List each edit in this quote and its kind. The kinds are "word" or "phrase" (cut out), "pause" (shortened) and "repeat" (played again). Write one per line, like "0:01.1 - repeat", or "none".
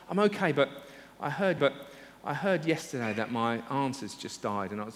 0:01.6 - repeat